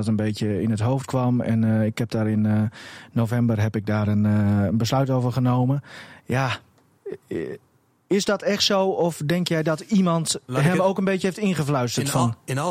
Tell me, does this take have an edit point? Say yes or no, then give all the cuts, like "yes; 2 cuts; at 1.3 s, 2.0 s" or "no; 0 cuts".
no; 0 cuts